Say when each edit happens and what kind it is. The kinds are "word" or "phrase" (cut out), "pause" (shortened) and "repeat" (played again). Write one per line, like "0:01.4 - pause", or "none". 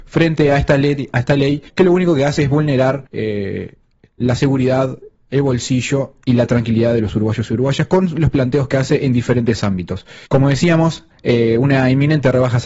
0:01.7 - pause
0:03.1 - pause
0:10.3 - pause